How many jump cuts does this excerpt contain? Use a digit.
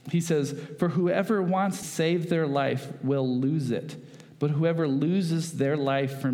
1